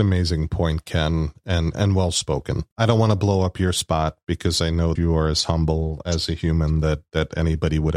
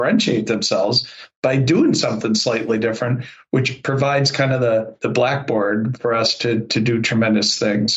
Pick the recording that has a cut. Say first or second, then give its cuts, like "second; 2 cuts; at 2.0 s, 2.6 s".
first; 3 cuts; at 1.7 s, 2.7 s, 5.0 s